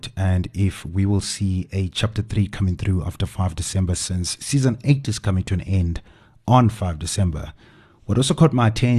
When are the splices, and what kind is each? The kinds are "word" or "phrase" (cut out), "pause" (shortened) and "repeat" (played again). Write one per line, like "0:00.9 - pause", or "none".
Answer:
none